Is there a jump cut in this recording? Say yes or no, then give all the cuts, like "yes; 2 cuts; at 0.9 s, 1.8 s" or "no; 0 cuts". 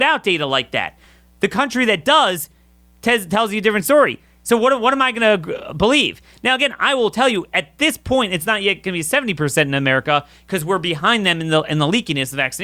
no; 0 cuts